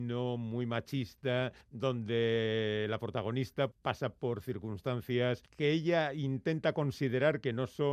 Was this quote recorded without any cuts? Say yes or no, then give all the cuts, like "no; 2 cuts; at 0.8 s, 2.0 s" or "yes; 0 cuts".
no; 3 cuts; at 1.6 s, 3.7 s, 5.5 s